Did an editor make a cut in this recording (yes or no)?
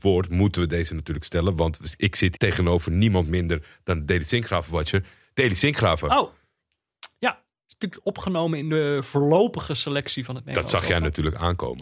yes